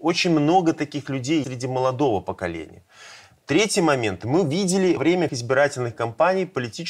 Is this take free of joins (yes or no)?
no